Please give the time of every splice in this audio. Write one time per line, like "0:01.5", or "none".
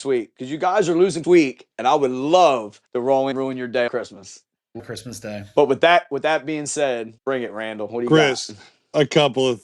0:01.2
0:02.9
0:03.3
0:03.9
0:04.8
0:07.2